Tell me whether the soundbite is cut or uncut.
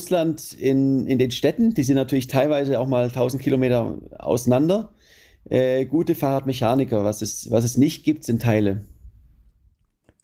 uncut